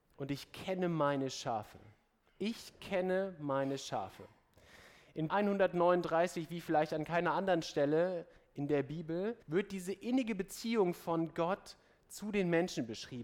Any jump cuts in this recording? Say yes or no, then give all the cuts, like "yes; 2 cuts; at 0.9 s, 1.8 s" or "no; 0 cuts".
yes; 2 cuts; at 5.3 s, 9.4 s